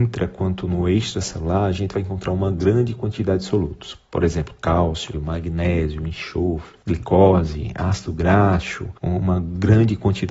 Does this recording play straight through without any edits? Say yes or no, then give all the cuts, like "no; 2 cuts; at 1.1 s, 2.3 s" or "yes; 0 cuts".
no; 1 cut; at 5.1 s